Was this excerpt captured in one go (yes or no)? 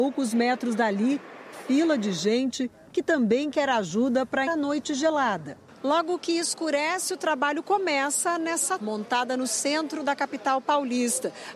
no